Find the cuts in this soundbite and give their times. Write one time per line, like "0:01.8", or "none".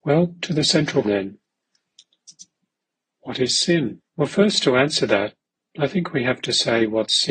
0:01.0
0:04.1